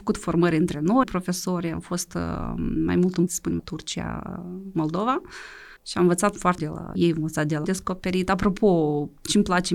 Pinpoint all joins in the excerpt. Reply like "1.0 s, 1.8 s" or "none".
1.0 s, 3.3 s, 3.6 s, 5.8 s, 6.6 s, 7.0 s, 7.6 s

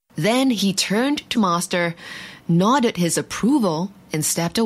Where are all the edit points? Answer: 1.3 s

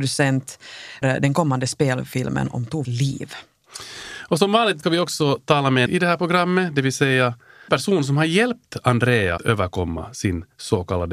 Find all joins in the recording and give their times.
1.0 s, 2.8 s, 4.8 s, 5.9 s, 7.7 s, 9.4 s

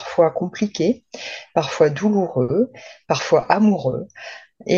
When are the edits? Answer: none

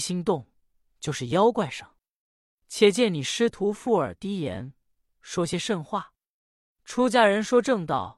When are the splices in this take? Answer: none

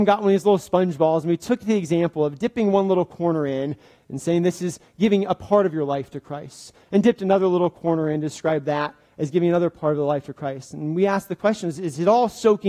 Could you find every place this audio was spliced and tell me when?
none

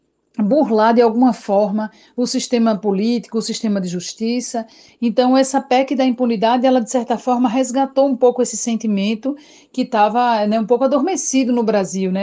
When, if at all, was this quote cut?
none

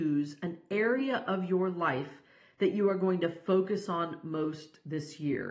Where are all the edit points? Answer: none

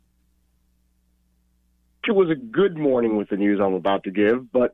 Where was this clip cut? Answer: none

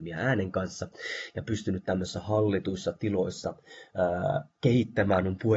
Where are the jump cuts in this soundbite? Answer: 4.5 s

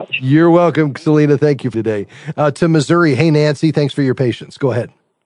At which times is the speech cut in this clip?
1.7 s

